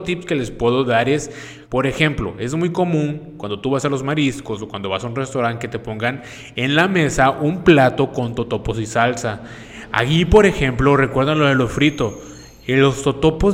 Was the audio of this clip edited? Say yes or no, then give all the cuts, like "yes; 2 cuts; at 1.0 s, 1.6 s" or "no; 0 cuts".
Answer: yes; 1 cut; at 1.6 s